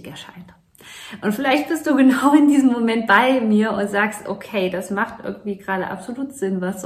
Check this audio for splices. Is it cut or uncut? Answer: uncut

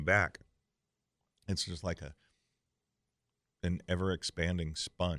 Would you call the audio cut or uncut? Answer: uncut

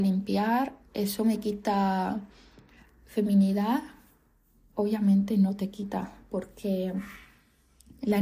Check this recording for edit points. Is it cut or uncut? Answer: uncut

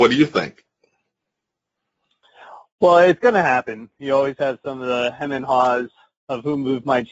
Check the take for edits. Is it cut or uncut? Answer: uncut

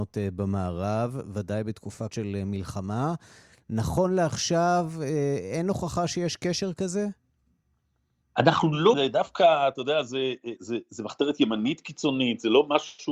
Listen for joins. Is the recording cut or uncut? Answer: cut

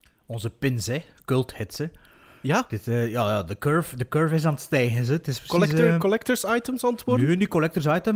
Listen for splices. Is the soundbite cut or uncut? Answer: uncut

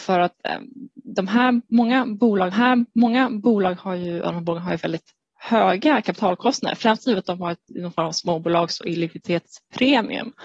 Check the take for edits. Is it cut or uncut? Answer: cut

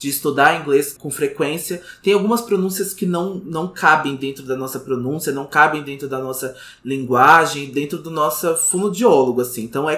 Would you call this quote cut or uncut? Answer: cut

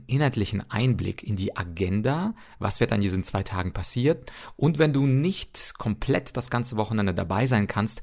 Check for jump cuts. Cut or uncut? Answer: uncut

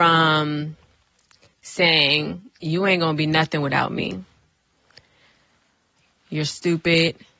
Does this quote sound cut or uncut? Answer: uncut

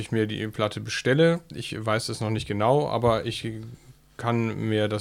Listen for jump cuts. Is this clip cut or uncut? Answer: uncut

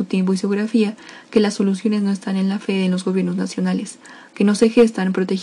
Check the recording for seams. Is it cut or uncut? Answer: uncut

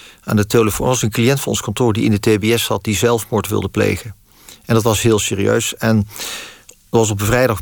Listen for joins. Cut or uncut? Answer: uncut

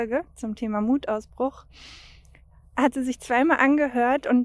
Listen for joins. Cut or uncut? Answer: uncut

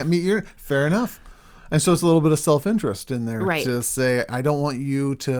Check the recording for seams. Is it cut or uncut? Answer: uncut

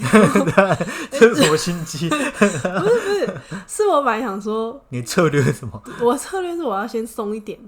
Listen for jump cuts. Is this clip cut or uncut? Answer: uncut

